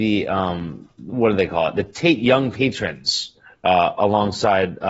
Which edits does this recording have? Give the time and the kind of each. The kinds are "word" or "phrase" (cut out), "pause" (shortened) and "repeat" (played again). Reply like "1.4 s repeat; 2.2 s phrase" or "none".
none